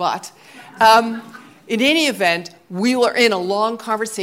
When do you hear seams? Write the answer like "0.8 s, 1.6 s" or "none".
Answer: none